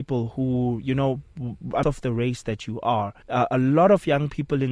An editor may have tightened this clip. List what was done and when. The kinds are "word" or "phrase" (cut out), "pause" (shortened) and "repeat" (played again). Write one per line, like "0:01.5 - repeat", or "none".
0:01.8 - phrase
0:03.2 - pause

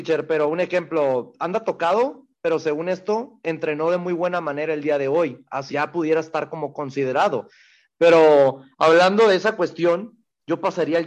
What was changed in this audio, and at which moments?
0:05.7 - phrase
0:08.7 - pause

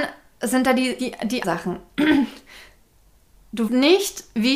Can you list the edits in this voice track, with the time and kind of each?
0:01.0 - word
0:01.4 - word
0:03.7 - word

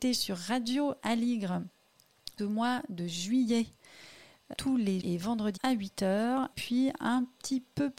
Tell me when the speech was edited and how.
0:02.4 - word
0:04.5 - word
0:05.0 - word
0:05.6 - word
0:06.5 - word

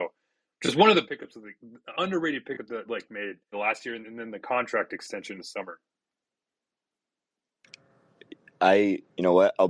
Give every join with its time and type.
0:01.0 - word
0:01.9 - word
0:02.9 - word
0:03.5 - word
0:04.0 - word
0:05.4 - word

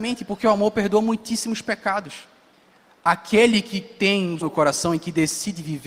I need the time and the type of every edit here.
0:02.5 - pause
0:04.4 - word

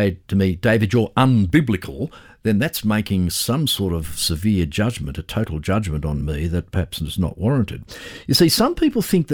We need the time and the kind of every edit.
none

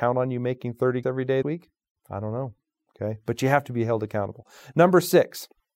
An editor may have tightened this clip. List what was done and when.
0:01.0 - word
0:01.4 - word

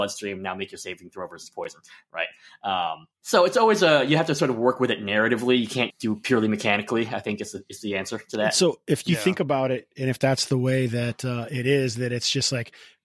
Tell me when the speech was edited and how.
0:03.1 - pause
0:05.9 - word

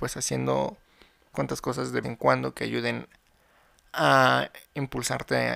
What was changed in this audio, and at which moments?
0:01.3 - word
0:02.0 - word

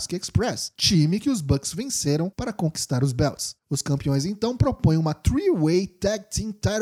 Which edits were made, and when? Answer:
none

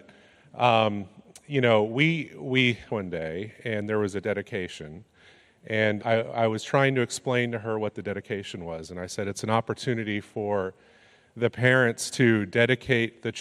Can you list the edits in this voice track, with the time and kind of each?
0:02.9 - phrase
0:06.0 - word

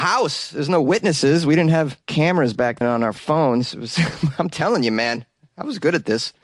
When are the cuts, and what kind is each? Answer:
0:02.0 - pause
0:02.8 - word

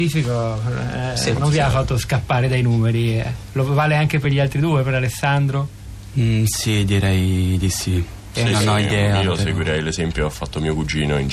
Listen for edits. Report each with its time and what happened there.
none

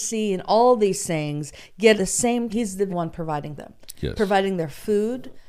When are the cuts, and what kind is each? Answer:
0:02.0 - word
0:02.5 - word
0:02.9 - word
0:03.6 - word

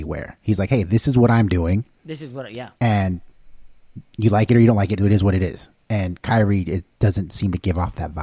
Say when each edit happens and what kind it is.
0:02.8 - pause

